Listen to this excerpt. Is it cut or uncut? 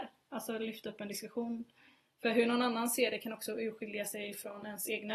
uncut